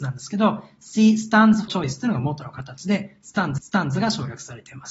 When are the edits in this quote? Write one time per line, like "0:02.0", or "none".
0:01.7
0:03.6